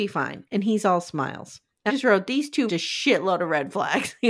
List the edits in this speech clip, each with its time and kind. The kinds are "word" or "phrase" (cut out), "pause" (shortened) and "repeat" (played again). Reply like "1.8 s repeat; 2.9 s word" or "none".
1.9 s word; 2.7 s word